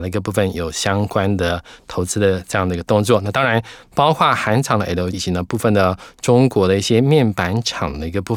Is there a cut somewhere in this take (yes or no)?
yes